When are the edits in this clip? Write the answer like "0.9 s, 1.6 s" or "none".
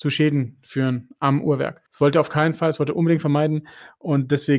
1.9 s